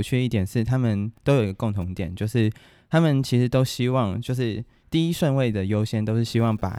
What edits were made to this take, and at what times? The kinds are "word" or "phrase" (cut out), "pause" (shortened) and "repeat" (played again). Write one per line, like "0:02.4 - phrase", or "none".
none